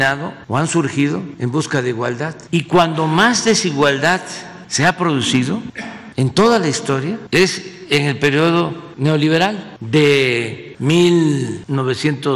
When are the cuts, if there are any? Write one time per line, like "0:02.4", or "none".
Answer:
none